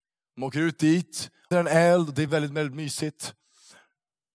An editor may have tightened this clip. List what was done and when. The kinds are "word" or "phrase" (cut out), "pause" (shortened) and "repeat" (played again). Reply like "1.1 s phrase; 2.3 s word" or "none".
1.5 s phrase; 2.3 s word